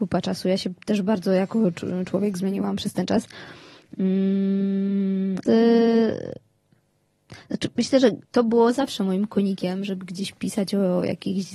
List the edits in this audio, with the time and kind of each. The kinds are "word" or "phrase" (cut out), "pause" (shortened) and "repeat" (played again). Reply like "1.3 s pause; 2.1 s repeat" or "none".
5.4 s phrase; 8.2 s pause